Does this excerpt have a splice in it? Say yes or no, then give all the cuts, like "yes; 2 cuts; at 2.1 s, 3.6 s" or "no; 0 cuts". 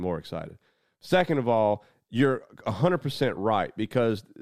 no; 0 cuts